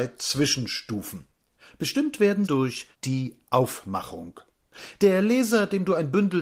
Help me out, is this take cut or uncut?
cut